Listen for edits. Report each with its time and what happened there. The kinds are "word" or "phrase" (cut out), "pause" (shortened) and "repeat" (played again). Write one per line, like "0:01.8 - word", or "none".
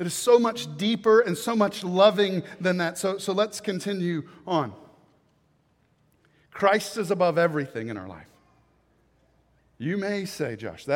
none